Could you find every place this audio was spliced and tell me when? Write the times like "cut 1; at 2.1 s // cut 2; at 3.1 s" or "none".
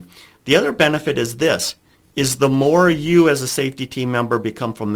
cut 1; at 1.9 s